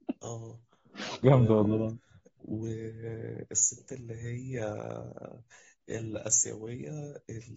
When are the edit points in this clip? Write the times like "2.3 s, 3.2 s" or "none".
1.2 s, 2.4 s